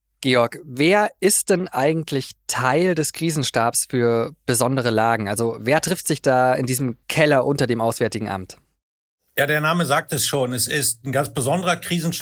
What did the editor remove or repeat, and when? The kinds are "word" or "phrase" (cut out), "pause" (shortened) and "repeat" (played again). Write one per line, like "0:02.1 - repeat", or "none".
0:07.0 - pause